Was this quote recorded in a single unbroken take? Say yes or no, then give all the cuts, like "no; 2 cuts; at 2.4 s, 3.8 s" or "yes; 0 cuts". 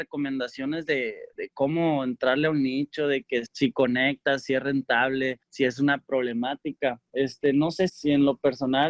no; 5 cuts; at 1.3 s, 3.5 s, 5.4 s, 7.0 s, 7.9 s